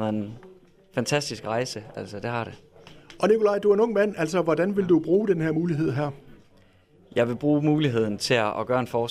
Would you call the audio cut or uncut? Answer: uncut